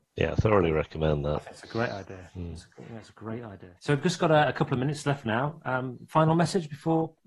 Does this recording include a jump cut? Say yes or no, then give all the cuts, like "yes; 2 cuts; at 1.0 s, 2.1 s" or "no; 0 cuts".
yes; 1 cut; at 3.8 s